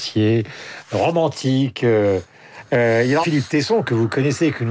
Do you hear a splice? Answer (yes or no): yes